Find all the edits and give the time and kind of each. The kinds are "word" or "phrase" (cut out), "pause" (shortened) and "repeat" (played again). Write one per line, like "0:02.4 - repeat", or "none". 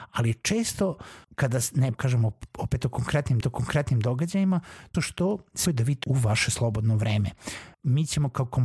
0:01.2 - pause
0:01.9 - word
0:03.4 - repeat
0:04.9 - phrase
0:05.7 - word
0:06.0 - word
0:07.7 - pause